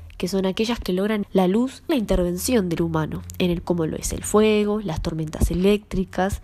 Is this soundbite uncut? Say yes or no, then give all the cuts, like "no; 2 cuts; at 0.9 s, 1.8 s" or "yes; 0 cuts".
no; 4 cuts; at 1.2 s, 1.9 s, 2.8 s, 3.6 s